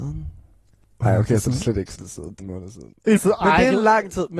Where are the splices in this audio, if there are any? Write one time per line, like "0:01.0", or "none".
0:02.0
0:02.4
0:03.2